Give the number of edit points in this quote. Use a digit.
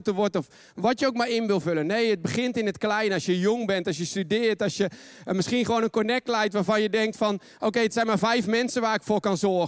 0